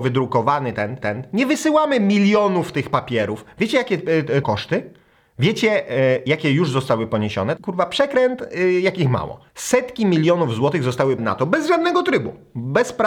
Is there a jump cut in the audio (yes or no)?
yes